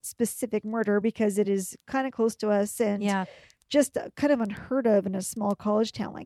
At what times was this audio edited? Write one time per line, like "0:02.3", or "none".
none